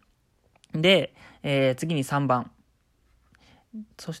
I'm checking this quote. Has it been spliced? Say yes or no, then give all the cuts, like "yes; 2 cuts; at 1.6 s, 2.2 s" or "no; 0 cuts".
no; 0 cuts